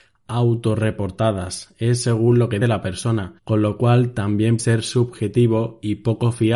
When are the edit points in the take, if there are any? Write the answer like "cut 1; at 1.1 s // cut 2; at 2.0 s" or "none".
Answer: cut 1; at 2.6 s // cut 2; at 3.4 s // cut 3; at 4.6 s